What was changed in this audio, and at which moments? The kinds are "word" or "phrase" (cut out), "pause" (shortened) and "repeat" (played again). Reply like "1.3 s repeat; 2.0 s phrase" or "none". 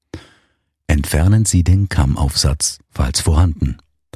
2.8 s pause